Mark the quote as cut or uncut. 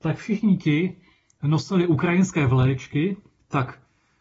cut